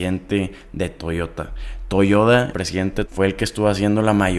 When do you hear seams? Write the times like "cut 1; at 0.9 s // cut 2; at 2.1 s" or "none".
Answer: cut 1; at 2.5 s // cut 2; at 3.0 s